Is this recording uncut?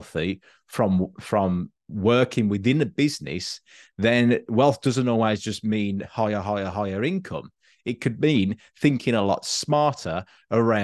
yes; 0 cuts

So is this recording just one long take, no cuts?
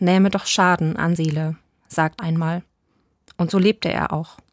no; 2 cuts; at 1.2 s, 2.2 s

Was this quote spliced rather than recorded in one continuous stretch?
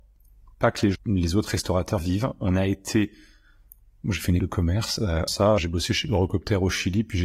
yes; 5 cuts; at 0.9 s, 2.0 s, 4.4 s, 5.3 s, 5.6 s

